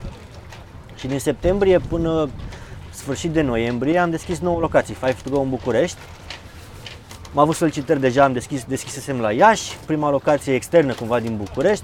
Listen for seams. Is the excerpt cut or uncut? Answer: uncut